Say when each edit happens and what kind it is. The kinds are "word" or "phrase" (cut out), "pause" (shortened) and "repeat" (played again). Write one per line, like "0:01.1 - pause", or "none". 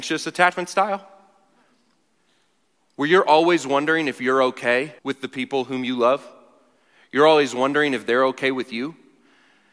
0:05.0 - pause

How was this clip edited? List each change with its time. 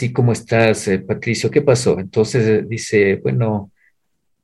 none

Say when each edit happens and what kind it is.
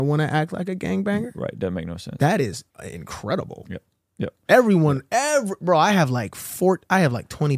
0:02.7 - pause

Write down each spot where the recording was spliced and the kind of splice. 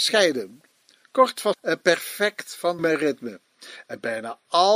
0:01.5 - word
0:02.8 - word

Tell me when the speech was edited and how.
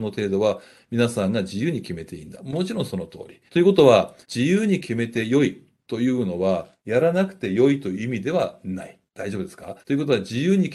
0:03.5 - pause
0:04.2 - pause
0:09.1 - pause
0:09.8 - pause

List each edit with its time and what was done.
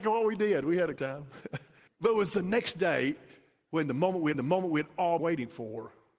0:01.0 - word
0:01.9 - pause
0:04.3 - repeat
0:05.2 - word

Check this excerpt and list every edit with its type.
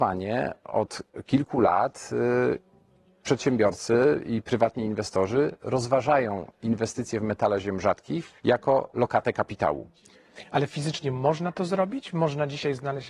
0:08.4 - pause

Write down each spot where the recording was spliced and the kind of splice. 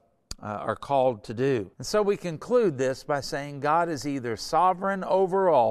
0:01.7 - pause

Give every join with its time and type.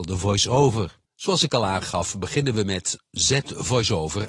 0:01.1 - pause

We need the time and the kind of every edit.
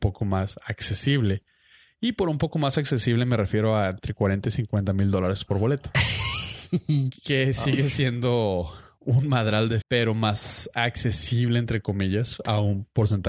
0:09.8 - word

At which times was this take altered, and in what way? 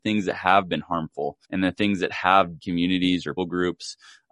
0:01.4 - pause
0:02.6 - word
0:03.4 - word

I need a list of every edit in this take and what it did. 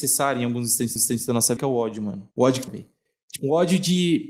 0:01.0 - repeat
0:01.6 - word
0:02.7 - word
0:03.4 - word

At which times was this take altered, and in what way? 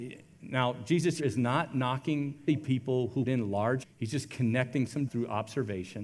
0:01.2 - word
0:02.5 - word
0:03.3 - word
0:03.8 - word
0:05.1 - word

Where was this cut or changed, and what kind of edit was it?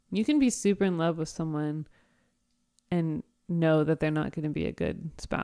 none

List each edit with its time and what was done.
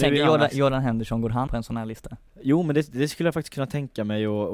0:01.5 - word
0:02.3 - pause

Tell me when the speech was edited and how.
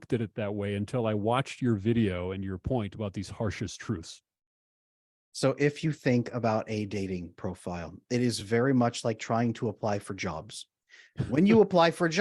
none

